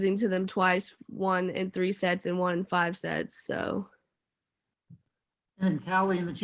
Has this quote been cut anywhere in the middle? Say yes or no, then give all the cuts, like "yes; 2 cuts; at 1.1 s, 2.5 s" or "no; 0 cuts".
no; 0 cuts